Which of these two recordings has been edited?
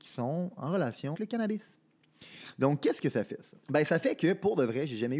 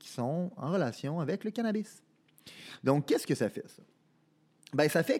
first; 2 cuts; at 1.1 s, 3.6 s

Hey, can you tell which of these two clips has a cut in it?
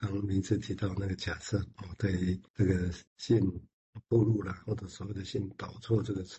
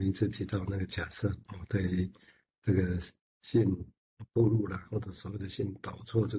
first; 2 cuts; at 2.5 s, 3.1 s

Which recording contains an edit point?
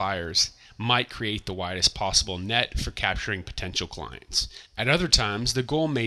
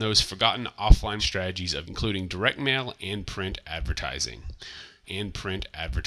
second; 3 cuts; at 1.2 s, 1.8 s, 5.0 s

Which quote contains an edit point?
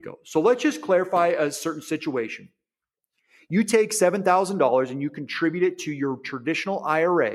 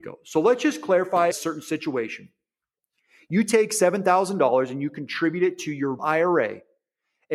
second; 2 cuts; at 1.3 s, 6.0 s

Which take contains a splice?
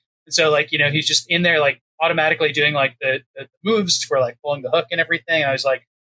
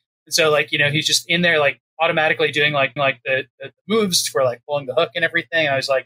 second; 1 cut; at 3.0 s

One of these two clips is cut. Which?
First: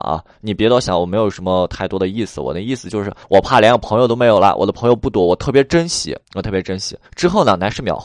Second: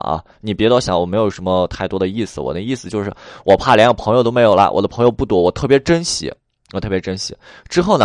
first; 3 cuts; at 3.2 s, 6.3 s, 7.1 s

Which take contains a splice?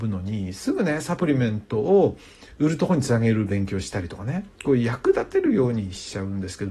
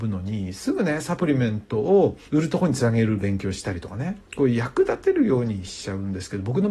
second; 1 cut; at 2.3 s

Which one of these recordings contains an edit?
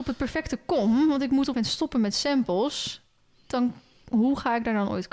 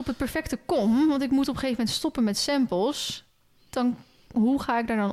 first; 1 cut; at 1.5 s

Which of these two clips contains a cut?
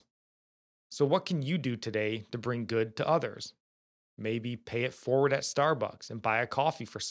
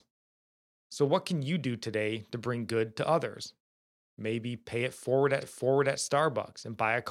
second; 1 cut; at 5.4 s

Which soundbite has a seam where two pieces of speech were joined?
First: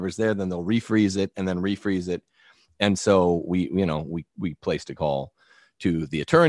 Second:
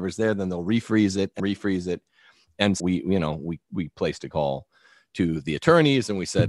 second; 2 cuts; at 1.4 s, 2.8 s

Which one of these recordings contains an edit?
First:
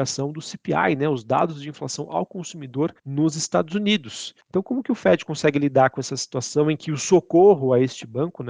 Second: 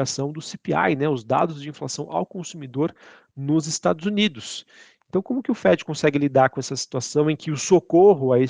first; 2 cuts; at 3.0 s, 4.4 s

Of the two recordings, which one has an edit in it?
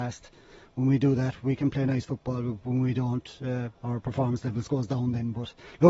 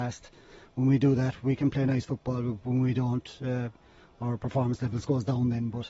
first; 1 cut; at 3.7 s

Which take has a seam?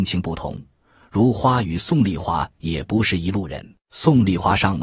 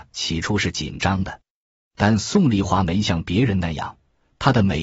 first; 1 cut; at 3.8 s

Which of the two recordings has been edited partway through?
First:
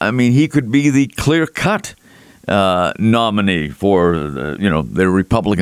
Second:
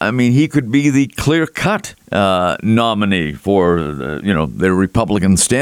second; 1 cut; at 2.0 s

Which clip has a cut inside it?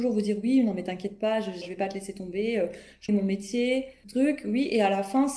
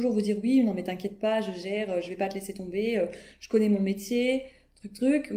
first; 3 cuts; at 1.6 s, 3.1 s, 4.0 s

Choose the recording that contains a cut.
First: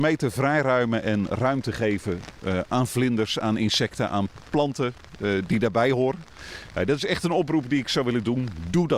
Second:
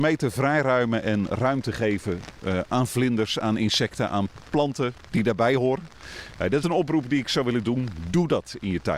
second; 2 cuts; at 5.1 s, 6.6 s

